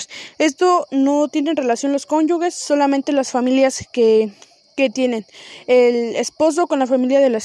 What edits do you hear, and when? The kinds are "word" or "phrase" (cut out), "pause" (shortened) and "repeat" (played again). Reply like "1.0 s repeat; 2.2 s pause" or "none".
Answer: none